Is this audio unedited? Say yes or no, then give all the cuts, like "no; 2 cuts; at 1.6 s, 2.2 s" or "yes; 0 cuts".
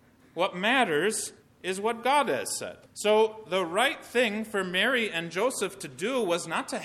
no; 2 cuts; at 1.4 s, 2.9 s